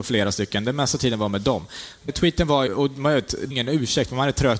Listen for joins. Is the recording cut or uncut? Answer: cut